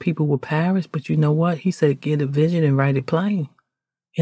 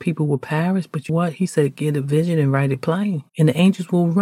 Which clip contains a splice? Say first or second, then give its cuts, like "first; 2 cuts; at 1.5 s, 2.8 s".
second; 2 cuts; at 1.1 s, 3.3 s